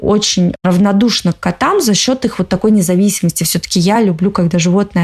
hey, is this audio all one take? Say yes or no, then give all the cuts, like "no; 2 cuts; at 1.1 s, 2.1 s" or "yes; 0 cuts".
yes; 0 cuts